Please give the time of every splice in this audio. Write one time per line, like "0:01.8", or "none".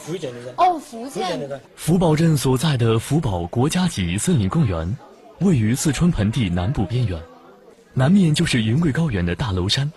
0:01.7